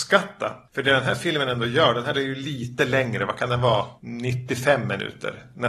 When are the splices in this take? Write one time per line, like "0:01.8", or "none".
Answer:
0:04.0